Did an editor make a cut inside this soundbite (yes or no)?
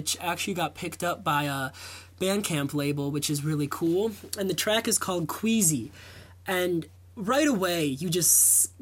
no